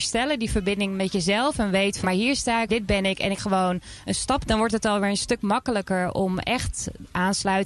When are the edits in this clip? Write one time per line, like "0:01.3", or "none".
0:02.0
0:02.7
0:03.4
0:04.4